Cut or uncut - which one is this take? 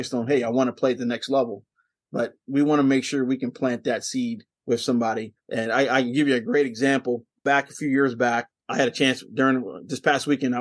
cut